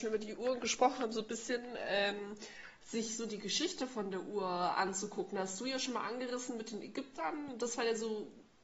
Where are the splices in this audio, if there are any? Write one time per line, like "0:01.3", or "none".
none